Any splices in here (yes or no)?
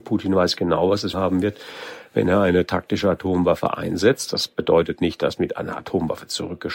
yes